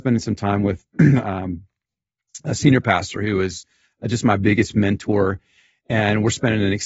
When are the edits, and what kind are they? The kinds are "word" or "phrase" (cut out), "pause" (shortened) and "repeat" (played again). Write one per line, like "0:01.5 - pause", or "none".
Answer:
none